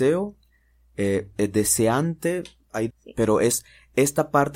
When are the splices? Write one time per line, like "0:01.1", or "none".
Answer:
0:01.3
0:02.9

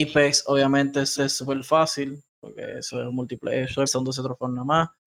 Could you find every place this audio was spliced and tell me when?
0:01.2
0:03.9

